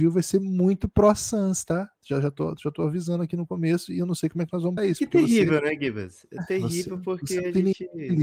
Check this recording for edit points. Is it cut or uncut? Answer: cut